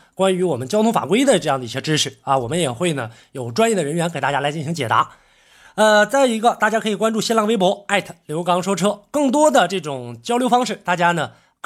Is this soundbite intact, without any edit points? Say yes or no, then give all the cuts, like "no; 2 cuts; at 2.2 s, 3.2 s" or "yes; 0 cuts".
yes; 0 cuts